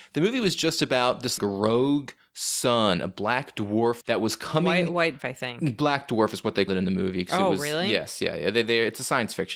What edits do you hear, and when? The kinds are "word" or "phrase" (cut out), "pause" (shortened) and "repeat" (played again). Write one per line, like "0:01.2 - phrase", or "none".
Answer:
0:01.4 - word
0:04.0 - word
0:05.2 - word
0:06.7 - word